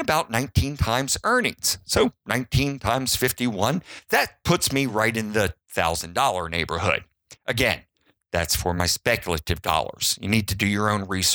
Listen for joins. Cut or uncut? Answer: uncut